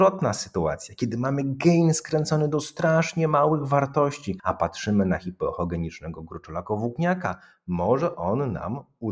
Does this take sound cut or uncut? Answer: uncut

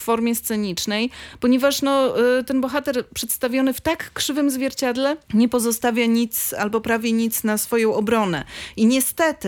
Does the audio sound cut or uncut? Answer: cut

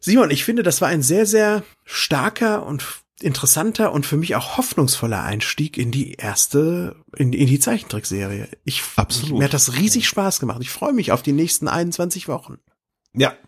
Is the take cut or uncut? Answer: cut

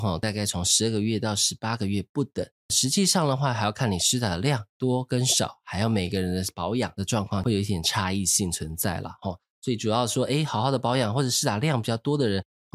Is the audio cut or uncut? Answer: uncut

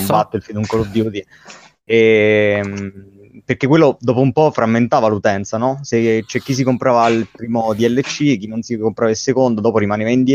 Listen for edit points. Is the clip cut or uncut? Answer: uncut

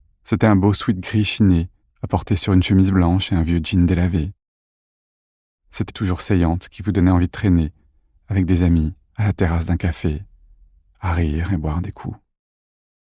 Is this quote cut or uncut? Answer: cut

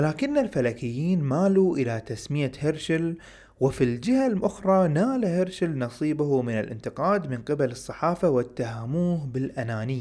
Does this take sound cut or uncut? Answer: uncut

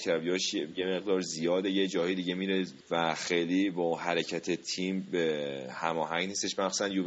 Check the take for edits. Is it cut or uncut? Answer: cut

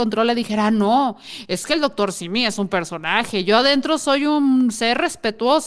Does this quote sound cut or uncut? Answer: uncut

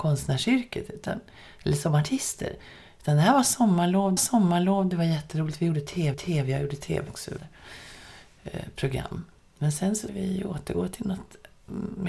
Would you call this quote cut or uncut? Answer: cut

